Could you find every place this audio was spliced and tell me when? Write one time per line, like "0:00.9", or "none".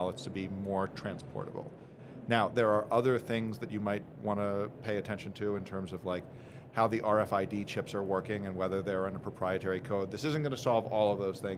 none